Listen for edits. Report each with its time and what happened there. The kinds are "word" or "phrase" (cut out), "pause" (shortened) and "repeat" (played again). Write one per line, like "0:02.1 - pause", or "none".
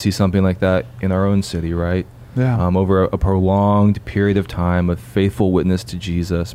none